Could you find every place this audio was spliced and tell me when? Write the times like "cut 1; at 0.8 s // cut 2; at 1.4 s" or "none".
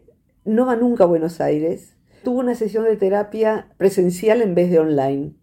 cut 1; at 2.2 s